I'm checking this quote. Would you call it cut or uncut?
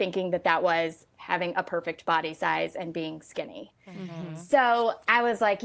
uncut